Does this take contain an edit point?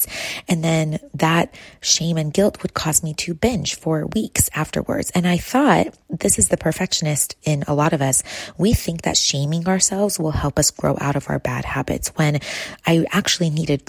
no; 0 cuts

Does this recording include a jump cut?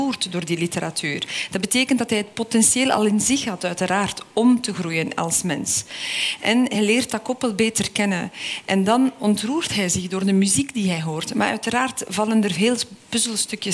no; 0 cuts

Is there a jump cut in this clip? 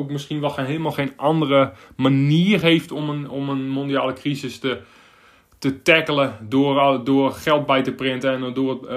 no; 0 cuts

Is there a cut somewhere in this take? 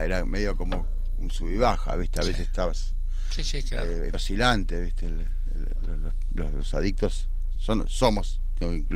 yes; 2 cuts; at 4.1 s, 7.5 s

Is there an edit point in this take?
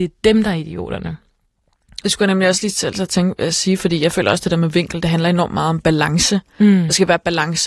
no; 0 cuts

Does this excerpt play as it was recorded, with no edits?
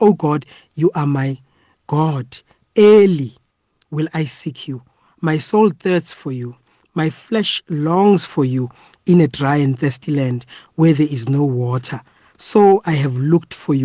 yes; 0 cuts

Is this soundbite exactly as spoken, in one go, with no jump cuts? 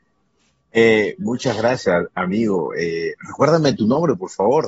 yes; 0 cuts

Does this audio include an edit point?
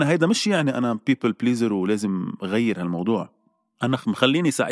no; 0 cuts

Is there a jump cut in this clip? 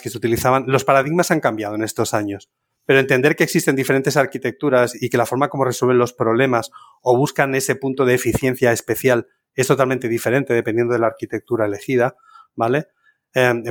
no; 0 cuts

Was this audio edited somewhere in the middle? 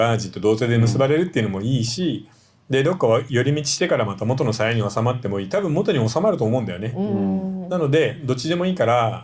no; 0 cuts

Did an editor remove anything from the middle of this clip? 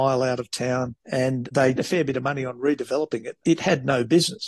yes; 3 cuts; at 1.0 s, 1.8 s, 3.4 s

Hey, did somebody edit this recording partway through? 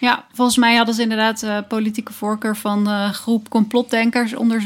no; 0 cuts

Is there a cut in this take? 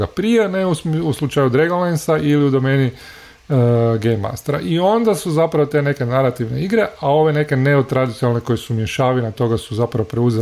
no; 0 cuts

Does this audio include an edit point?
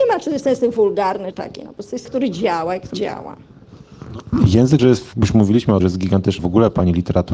yes; 7 cuts; at 1.3 s, 2.0 s, 2.9 s, 4.8 s, 5.1 s, 5.8 s, 6.4 s

